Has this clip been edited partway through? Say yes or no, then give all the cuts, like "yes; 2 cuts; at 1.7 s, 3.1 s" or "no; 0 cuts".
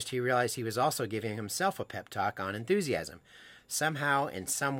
no; 0 cuts